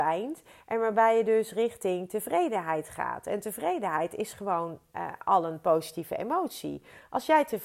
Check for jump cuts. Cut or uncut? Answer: uncut